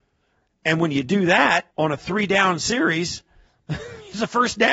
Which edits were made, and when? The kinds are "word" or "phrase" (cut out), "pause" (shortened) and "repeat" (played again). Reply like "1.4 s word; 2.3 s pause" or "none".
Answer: 1.7 s pause